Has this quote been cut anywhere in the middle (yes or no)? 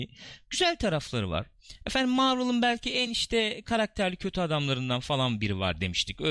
no